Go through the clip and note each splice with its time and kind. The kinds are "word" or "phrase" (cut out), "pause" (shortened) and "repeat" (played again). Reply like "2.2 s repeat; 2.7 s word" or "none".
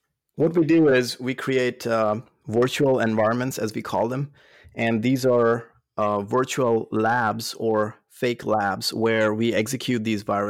none